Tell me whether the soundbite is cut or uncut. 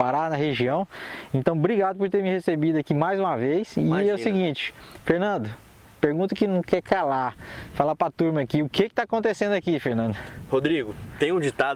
uncut